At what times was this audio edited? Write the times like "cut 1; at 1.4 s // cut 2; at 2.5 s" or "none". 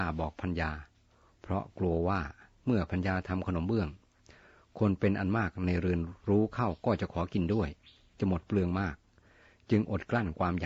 cut 1; at 6.2 s